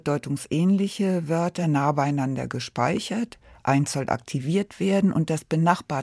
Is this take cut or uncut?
uncut